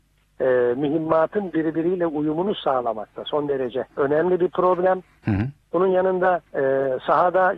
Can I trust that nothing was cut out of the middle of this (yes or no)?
no